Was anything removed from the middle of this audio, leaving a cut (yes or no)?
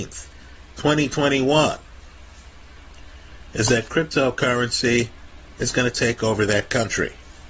no